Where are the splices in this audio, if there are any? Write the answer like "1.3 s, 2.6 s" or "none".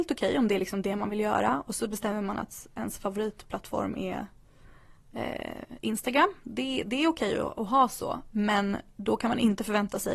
none